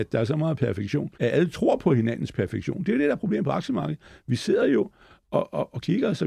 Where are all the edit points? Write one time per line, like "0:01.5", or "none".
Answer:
0:01.1